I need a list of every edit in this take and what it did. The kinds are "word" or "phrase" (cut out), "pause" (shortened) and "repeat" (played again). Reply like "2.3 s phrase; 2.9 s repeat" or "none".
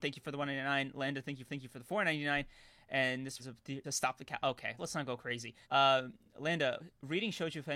1.5 s repeat; 3.4 s word; 3.8 s phrase; 4.8 s word; 5.6 s pause

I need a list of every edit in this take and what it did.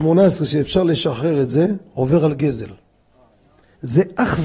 none

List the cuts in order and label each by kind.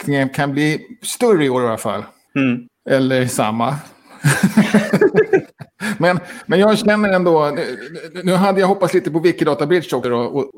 2.7 s pause

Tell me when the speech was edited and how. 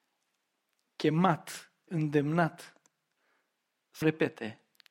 1.9 s word; 4.0 s word

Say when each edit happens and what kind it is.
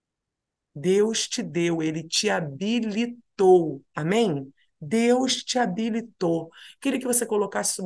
none

